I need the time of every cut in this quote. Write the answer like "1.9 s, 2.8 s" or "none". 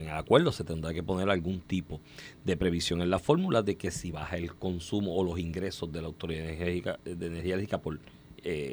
none